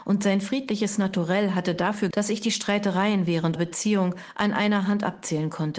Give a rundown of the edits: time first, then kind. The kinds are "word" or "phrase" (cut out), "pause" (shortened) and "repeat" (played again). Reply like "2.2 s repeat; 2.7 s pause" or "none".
2.1 s word; 3.6 s word

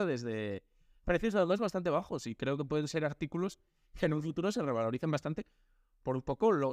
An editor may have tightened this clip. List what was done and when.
none

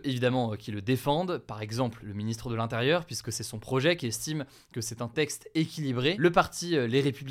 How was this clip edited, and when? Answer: none

